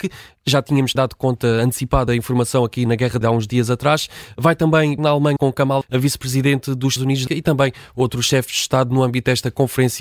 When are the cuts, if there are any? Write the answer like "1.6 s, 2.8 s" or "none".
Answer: 1.0 s, 2.1 s, 2.9 s, 3.2 s, 5.0 s, 5.4 s, 5.8 s, 7.0 s, 7.3 s